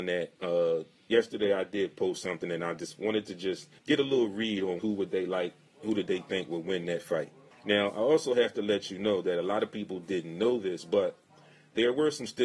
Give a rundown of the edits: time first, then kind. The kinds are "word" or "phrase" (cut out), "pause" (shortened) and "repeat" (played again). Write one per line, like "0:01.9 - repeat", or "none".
0:03.8 - pause
0:04.8 - phrase
0:07.5 - pause